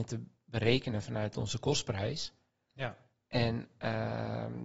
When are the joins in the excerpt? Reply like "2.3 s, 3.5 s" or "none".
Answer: none